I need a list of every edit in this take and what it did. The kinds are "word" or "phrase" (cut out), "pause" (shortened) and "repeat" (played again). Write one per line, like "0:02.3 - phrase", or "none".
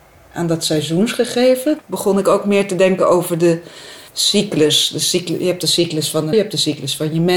0:04.1 - pause
0:06.3 - word